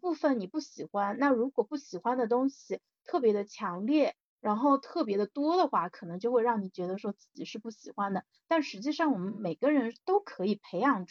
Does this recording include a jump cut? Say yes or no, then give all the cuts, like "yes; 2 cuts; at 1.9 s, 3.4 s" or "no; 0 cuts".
no; 0 cuts